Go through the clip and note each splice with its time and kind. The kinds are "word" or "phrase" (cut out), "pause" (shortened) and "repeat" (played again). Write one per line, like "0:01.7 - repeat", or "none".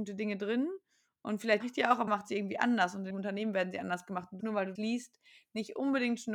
0:01.6 - word
0:02.1 - word
0:03.1 - word
0:04.4 - word
0:04.8 - word